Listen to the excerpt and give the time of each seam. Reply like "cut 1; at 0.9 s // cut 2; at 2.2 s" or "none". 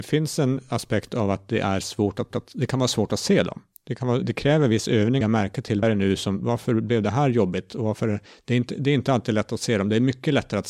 cut 1; at 2.3 s // cut 2; at 4.2 s // cut 3; at 5.2 s // cut 4; at 5.8 s // cut 5; at 8.3 s

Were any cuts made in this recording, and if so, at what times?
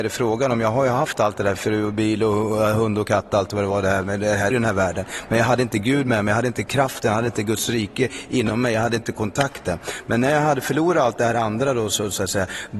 cut 1; at 4.5 s

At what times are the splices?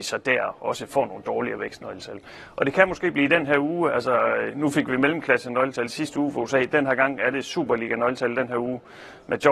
none

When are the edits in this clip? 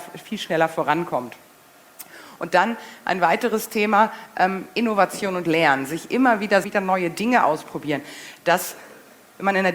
cut 1; at 6.6 s

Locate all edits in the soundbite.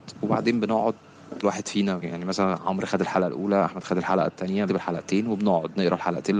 cut 1; at 1.4 s // cut 2; at 2.0 s // cut 3; at 4.7 s

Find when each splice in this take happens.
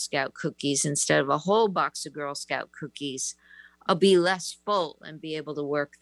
none

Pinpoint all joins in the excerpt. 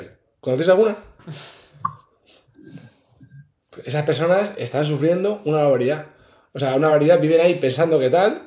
none

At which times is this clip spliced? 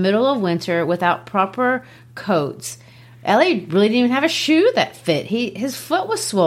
none

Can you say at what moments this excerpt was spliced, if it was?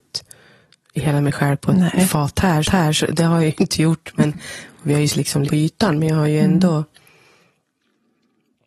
cut 1; at 2.6 s // cut 2; at 5.1 s // cut 3; at 5.4 s

